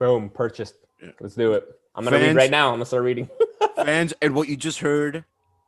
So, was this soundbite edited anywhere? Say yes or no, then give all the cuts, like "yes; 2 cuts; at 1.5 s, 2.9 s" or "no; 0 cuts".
no; 0 cuts